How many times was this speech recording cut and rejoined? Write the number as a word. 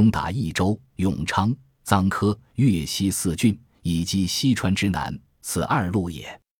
zero